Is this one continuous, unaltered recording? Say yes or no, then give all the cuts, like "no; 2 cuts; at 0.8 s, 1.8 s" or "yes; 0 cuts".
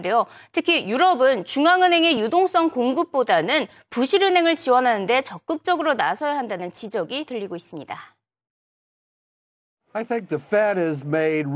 yes; 0 cuts